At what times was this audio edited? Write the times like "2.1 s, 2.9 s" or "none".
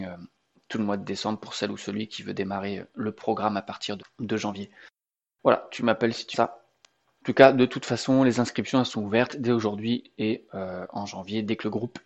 4.0 s, 6.3 s